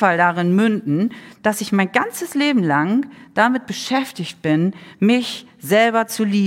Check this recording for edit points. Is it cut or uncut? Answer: uncut